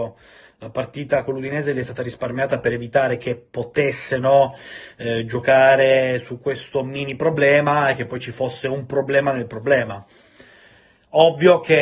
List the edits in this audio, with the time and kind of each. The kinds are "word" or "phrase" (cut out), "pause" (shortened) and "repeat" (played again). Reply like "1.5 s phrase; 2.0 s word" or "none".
none